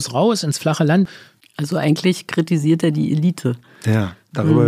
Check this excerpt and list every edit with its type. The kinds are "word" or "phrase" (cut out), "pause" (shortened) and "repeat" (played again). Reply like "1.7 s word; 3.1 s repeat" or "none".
none